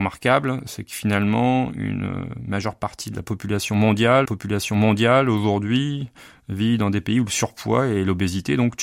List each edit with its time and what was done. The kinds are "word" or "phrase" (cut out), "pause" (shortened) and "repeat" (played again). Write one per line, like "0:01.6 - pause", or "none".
0:04.2 - repeat